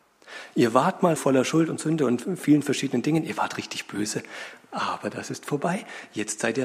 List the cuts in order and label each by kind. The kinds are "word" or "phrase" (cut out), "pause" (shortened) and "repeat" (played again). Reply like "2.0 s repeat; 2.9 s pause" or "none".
1.2 s word